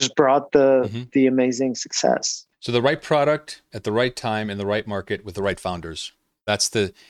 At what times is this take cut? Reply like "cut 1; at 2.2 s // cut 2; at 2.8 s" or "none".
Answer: none